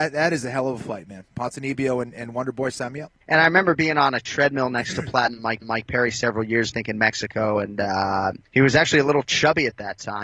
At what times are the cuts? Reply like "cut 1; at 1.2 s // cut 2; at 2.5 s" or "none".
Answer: cut 1; at 3.2 s // cut 2; at 5.6 s // cut 3; at 6.7 s // cut 4; at 8.5 s